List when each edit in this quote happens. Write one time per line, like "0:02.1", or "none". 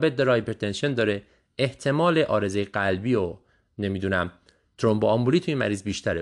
none